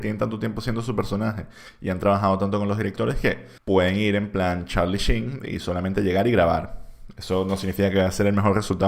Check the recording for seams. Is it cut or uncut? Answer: cut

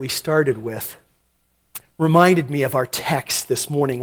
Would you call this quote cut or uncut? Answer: cut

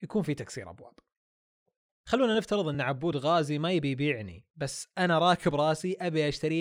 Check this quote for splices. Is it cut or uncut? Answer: uncut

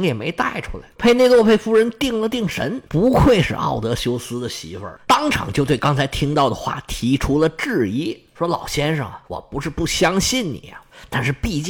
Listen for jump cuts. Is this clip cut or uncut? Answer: cut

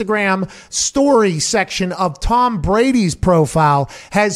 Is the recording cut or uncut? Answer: uncut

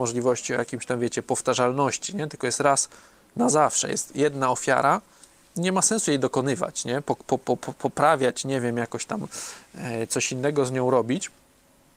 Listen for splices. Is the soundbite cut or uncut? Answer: uncut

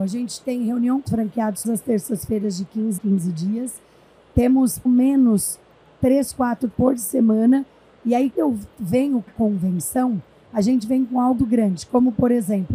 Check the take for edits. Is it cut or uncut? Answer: cut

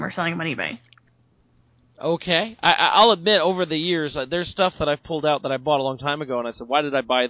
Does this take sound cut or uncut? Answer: uncut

